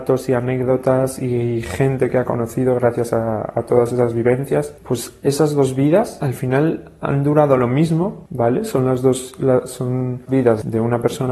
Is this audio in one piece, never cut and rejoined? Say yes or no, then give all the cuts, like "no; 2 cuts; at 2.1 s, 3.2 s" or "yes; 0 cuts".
no; 1 cut; at 10.3 s